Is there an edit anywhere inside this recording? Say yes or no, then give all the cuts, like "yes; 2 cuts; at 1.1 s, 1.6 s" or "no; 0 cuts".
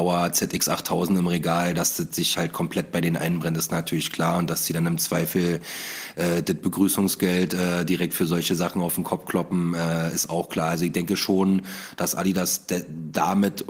no; 0 cuts